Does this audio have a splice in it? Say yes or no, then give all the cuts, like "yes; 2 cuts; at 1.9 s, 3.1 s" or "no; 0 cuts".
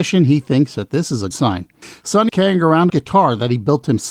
yes; 3 cuts; at 1.3 s, 2.3 s, 2.9 s